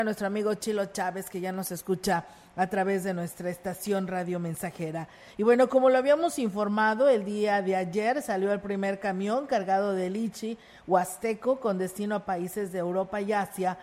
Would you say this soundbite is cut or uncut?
uncut